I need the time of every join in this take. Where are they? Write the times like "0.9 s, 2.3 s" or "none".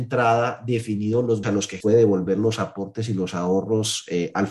1.4 s, 1.8 s